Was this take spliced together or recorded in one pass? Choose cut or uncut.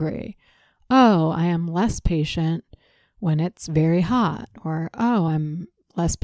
uncut